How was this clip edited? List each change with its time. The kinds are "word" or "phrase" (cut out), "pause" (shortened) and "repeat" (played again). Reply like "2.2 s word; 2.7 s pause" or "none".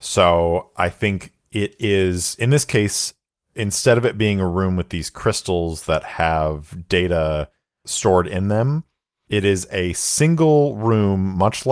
none